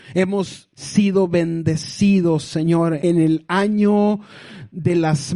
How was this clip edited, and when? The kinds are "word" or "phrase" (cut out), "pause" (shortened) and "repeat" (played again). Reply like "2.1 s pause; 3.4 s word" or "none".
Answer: none